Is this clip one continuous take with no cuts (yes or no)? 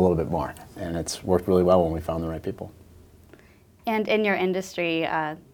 yes